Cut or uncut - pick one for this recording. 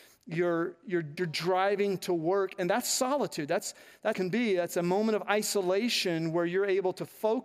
cut